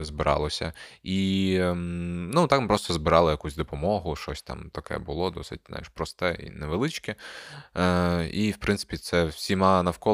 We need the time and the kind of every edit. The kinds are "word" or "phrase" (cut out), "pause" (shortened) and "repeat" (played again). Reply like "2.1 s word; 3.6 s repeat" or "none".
none